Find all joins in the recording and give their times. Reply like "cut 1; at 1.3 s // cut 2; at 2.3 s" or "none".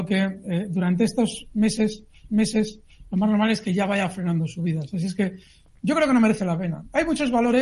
cut 1; at 2.3 s